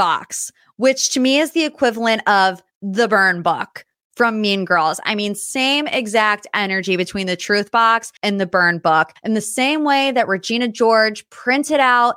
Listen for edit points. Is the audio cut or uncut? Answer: cut